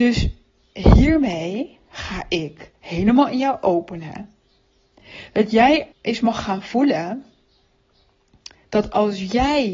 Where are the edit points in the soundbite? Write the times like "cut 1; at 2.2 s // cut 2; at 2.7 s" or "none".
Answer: cut 1; at 5.9 s